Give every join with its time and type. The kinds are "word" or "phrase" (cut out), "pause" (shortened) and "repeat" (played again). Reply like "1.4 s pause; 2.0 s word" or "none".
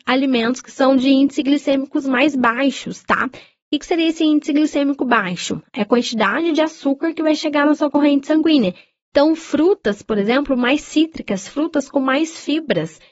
none